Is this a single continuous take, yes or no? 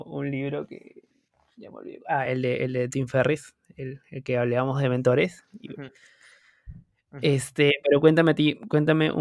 yes